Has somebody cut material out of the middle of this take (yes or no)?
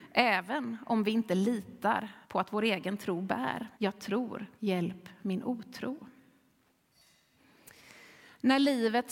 yes